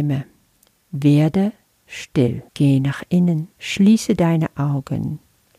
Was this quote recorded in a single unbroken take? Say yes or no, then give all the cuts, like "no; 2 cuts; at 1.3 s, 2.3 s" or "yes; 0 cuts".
no; 2 cuts; at 2.5 s, 3.5 s